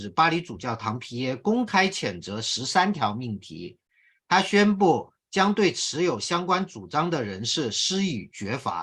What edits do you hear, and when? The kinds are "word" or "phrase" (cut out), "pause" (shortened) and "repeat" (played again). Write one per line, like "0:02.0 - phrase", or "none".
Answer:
none